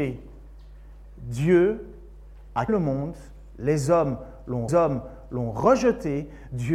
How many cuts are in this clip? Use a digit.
2